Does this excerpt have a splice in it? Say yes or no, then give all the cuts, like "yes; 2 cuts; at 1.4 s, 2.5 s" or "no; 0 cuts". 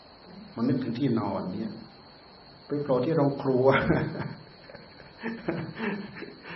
yes; 1 cut; at 2.6 s